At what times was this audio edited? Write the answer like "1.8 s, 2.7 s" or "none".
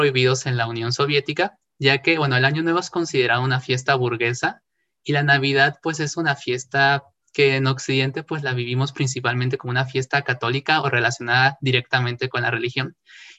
7.2 s